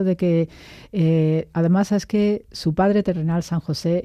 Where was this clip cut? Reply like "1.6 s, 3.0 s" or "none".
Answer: none